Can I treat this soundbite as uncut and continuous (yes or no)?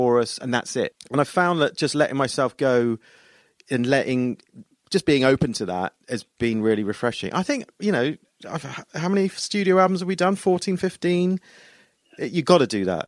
yes